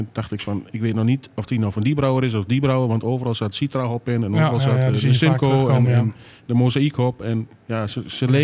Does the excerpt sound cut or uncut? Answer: uncut